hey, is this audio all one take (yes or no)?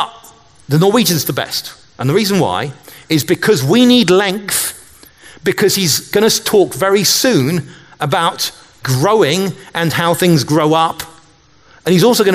yes